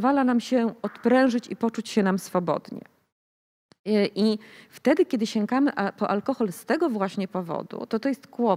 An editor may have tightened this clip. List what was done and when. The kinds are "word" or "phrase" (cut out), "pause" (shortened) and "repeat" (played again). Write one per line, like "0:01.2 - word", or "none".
none